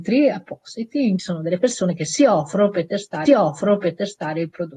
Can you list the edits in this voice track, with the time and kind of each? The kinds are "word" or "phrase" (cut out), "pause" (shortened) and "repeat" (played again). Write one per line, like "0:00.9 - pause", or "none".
0:01.2 - phrase
0:03.3 - repeat